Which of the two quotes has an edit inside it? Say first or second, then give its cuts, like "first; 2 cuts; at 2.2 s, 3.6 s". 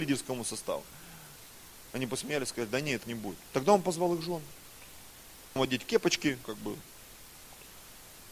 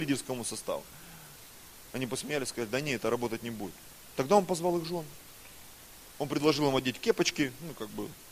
first; 4 cuts; at 3.0 s, 3.5 s, 5.6 s, 6.4 s